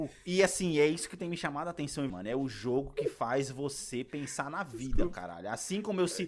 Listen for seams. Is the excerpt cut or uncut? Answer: cut